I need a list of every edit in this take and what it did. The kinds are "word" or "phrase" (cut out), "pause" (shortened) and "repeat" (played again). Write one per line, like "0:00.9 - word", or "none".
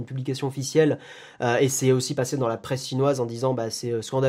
none

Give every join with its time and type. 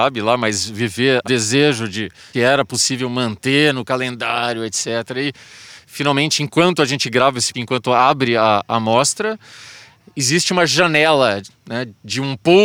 0:01.2 - phrase
0:02.3 - word
0:07.5 - word

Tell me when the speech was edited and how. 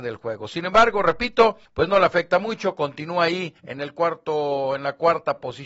0:01.7 - pause
0:03.6 - pause

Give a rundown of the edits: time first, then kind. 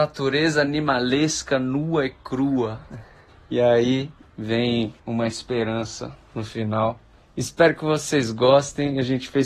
none

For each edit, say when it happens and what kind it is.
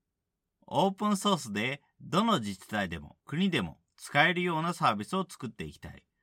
0:03.2 - pause

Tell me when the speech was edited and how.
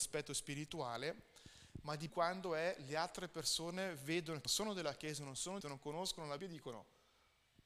0:02.1 - word
0:04.5 - word
0:05.6 - phrase
0:06.4 - word

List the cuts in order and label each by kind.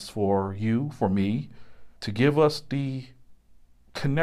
0:02.0 - pause

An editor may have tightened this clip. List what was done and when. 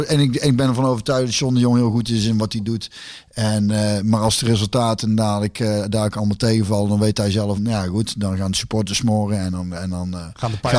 0:07.6 - phrase

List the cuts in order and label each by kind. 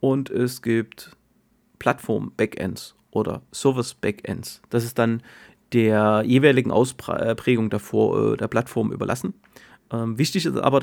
none

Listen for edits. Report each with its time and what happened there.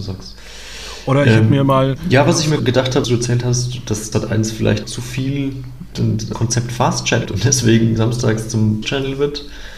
0:02.6 - word
0:03.0 - word
0:04.1 - word
0:04.8 - word
0:05.9 - word
0:06.3 - word
0:07.3 - word
0:08.0 - word
0:08.8 - word

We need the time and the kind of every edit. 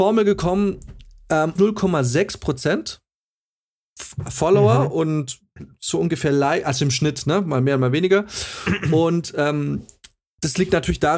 0:01.6 - phrase

